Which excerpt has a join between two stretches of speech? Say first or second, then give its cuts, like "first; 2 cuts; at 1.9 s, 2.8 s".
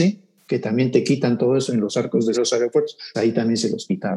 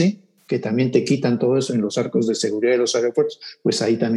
first; 2 cuts; at 2.3 s, 3.1 s